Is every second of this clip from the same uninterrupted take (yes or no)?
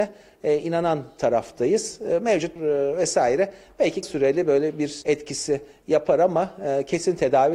no